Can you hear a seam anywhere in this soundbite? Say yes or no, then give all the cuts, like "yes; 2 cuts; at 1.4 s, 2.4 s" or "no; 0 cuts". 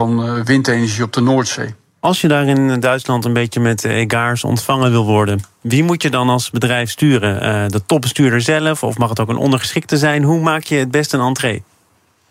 no; 0 cuts